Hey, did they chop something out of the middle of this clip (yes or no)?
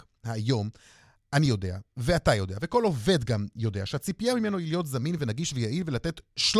no